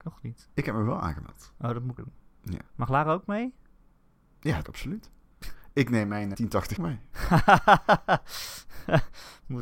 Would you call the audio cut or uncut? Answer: cut